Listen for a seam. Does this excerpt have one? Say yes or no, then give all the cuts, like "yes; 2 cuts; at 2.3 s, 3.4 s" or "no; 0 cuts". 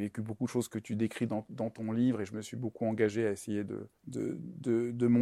yes; 1 cut; at 4.0 s